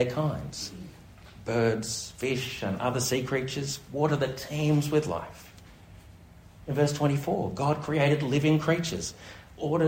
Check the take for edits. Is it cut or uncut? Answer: uncut